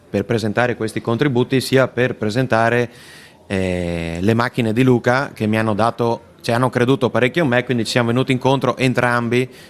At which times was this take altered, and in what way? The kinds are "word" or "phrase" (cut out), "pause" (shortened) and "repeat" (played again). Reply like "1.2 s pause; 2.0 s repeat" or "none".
none